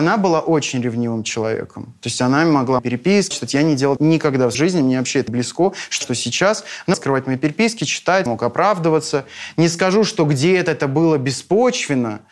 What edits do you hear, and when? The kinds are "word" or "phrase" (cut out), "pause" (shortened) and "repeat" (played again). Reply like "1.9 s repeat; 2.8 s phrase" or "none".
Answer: 2.8 s word; 3.3 s word; 4.0 s word; 4.5 s word; 5.3 s word; 6.0 s word; 6.9 s word; 8.3 s word